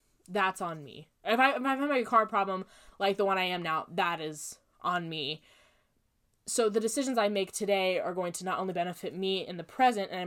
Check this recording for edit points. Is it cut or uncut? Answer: uncut